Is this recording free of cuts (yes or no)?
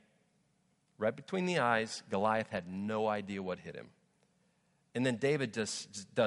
yes